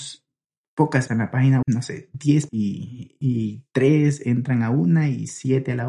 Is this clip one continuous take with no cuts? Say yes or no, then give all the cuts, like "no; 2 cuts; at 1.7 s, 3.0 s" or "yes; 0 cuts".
no; 3 cuts; at 1.1 s, 1.6 s, 2.5 s